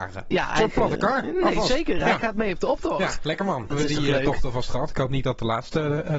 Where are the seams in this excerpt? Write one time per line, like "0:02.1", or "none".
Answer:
0:03.7